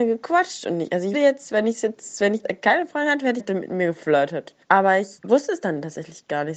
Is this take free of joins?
no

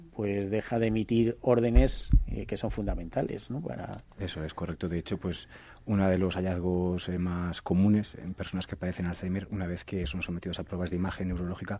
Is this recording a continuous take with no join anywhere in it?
yes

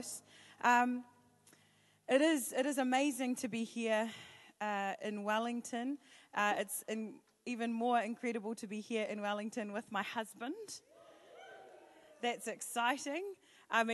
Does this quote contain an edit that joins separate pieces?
no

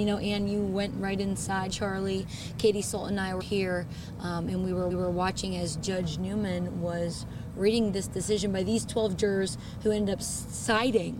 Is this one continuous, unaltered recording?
no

